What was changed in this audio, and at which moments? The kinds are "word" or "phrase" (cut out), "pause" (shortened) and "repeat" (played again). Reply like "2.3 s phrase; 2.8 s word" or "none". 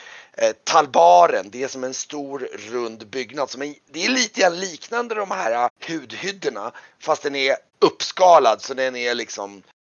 5.7 s word; 7.7 s pause